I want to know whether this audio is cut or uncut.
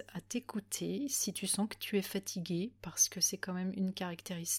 uncut